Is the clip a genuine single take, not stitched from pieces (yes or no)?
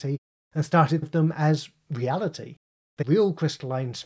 no